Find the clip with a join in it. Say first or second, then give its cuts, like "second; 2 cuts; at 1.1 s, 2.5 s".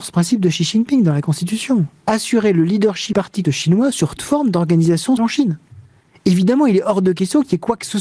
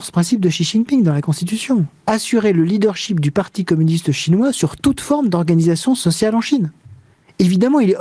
first; 4 cuts; at 3.1 s, 3.4 s, 4.2 s, 5.2 s